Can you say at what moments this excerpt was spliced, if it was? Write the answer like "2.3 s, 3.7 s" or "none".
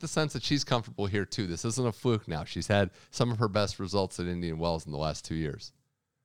none